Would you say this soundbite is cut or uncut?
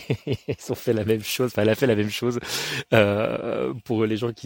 uncut